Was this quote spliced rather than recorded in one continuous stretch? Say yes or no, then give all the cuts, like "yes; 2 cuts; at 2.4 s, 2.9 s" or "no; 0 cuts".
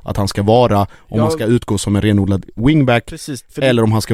no; 0 cuts